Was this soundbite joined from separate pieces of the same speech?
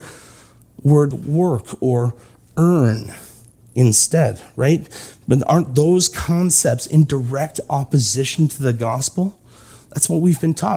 yes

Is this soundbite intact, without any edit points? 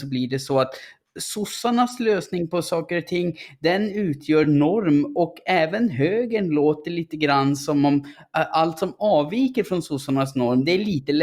yes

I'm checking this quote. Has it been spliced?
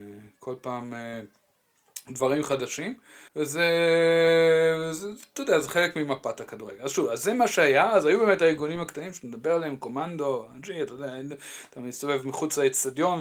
yes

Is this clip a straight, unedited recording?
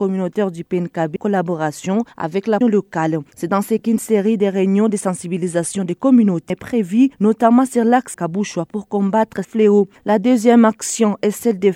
no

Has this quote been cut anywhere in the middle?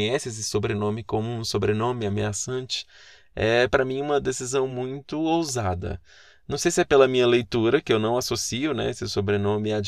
no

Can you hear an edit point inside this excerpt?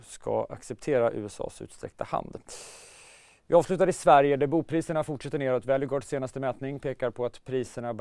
no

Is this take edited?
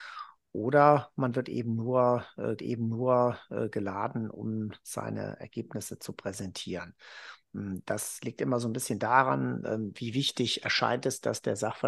yes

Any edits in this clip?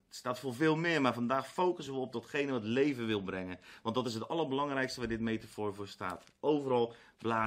no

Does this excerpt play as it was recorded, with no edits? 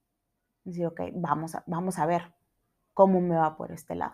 yes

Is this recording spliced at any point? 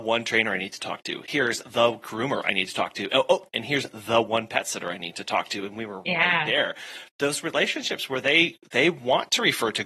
no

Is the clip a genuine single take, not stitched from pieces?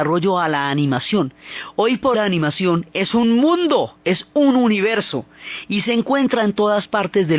no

